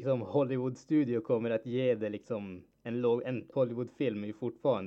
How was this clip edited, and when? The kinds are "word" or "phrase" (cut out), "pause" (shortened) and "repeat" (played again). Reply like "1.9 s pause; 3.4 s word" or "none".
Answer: 2.7 s pause; 3.5 s word